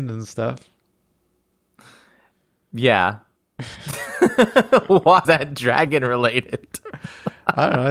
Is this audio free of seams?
no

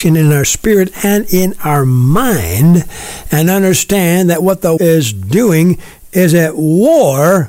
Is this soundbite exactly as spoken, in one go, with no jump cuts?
no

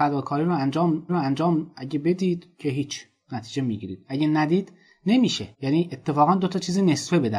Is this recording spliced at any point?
yes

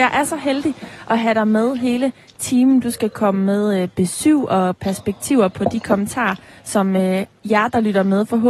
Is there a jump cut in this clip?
no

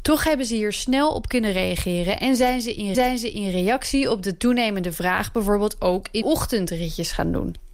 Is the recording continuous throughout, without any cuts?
no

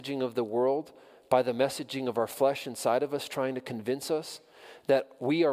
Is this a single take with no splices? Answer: yes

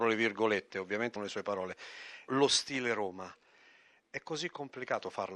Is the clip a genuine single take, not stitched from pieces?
no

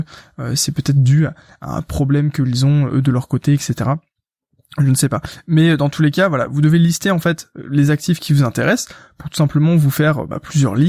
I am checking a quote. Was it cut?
no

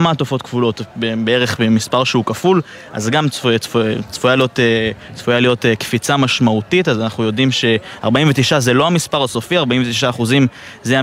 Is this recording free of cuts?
yes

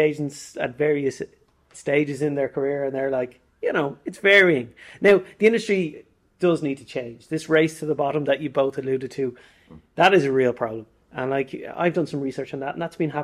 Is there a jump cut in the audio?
no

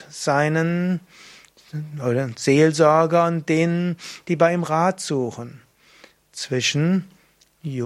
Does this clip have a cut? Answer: no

